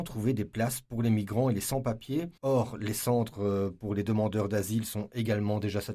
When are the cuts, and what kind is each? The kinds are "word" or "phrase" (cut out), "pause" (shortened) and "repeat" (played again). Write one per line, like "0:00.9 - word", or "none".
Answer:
0:02.4 - pause

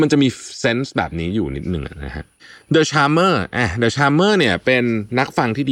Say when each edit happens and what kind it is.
0:02.4 - pause

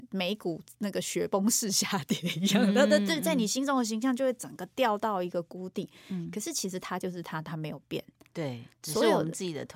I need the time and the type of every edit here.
none

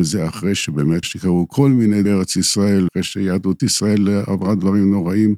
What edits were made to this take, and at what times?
0:01.0 - word
0:02.0 - word
0:02.9 - word
0:03.6 - word

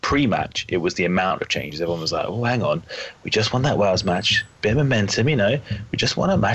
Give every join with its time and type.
none

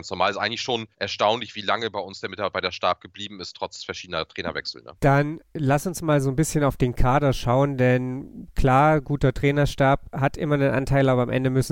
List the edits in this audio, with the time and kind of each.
0:00.9 - pause
0:05.0 - pause

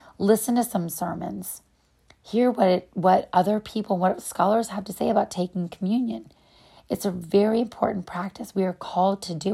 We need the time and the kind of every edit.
none

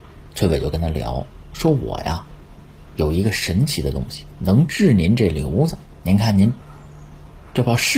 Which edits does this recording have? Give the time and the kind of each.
none

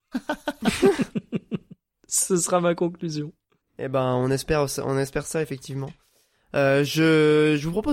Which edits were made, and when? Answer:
0:03.6 - pause

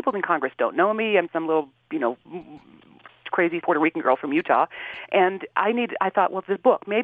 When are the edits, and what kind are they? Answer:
0:01.3 - word
0:03.6 - word

